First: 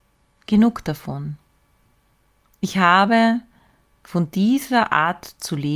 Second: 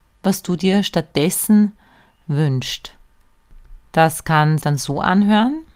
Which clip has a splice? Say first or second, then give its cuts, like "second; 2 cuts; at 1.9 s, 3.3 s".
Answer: second; 1 cut; at 4.6 s